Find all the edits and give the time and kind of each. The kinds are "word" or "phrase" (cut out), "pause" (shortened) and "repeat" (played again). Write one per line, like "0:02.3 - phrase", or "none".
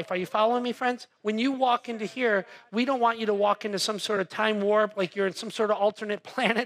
none